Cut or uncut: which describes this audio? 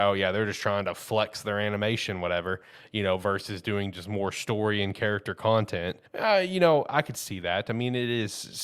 cut